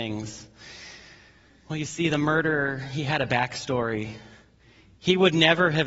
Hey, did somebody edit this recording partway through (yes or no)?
no